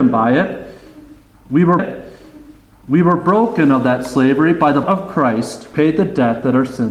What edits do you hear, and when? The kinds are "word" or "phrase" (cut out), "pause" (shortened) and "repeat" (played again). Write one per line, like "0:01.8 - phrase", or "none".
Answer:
0:01.8 - repeat
0:04.8 - word
0:05.7 - word